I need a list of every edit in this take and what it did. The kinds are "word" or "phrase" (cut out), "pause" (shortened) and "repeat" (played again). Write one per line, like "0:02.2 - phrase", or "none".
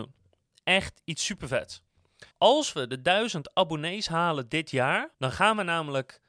0:02.3 - pause
0:05.1 - pause